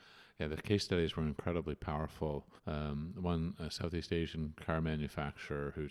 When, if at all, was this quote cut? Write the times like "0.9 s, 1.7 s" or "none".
2.6 s